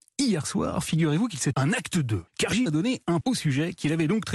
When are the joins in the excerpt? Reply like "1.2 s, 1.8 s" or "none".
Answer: 1.5 s, 2.3 s, 2.7 s, 3.2 s